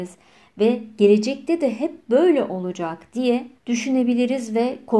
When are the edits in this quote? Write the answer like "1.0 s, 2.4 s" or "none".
3.6 s